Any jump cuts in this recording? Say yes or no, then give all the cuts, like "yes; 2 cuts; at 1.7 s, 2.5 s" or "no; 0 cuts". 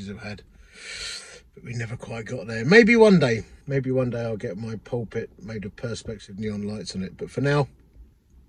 yes; 1 cut; at 3.6 s